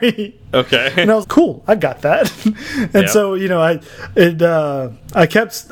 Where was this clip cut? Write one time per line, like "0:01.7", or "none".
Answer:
0:01.2